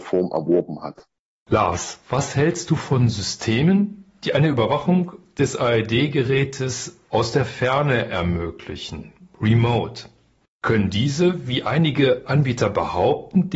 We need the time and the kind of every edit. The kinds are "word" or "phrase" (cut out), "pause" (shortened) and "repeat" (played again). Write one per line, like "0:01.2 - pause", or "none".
none

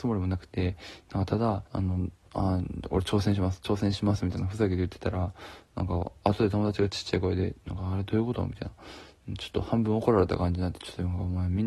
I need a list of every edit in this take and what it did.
0:01.7 - pause

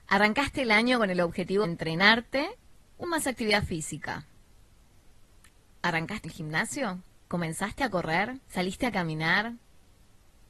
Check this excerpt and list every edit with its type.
0:01.6 - word
0:03.0 - word
0:06.2 - word
0:07.2 - pause
0:08.4 - pause

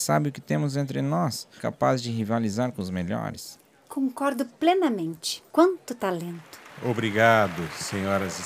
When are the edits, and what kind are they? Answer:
0:01.6 - phrase
0:05.5 - pause

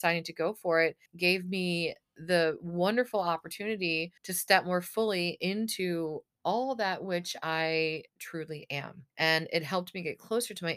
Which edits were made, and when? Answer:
0:01.1 - pause
0:04.2 - pause
0:08.1 - pause
0:09.1 - pause

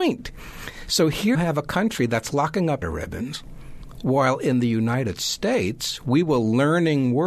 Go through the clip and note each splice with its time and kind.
0:01.3 - word
0:02.8 - word

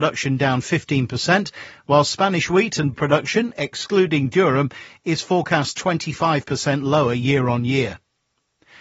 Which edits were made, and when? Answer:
0:02.9 - word

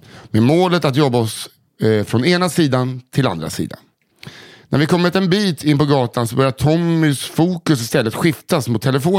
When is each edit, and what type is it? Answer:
none

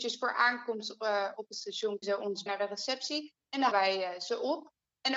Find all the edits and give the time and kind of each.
0:02.0 - word
0:02.5 - word
0:03.7 - word

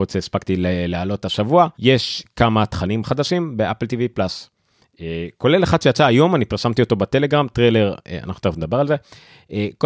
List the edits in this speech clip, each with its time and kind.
0:01.7 - pause

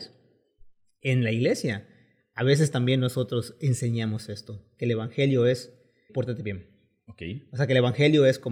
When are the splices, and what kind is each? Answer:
0:06.1 - word

